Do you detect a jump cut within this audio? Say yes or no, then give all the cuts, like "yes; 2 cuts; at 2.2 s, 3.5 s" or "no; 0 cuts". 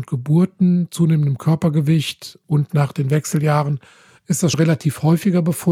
yes; 1 cut; at 4.5 s